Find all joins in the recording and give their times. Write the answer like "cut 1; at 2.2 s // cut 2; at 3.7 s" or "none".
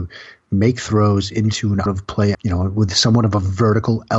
cut 1; at 1.9 s // cut 2; at 2.3 s